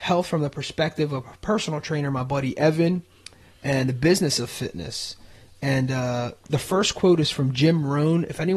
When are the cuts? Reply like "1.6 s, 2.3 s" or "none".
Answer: 6.4 s